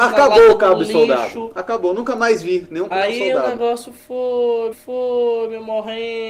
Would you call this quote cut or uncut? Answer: cut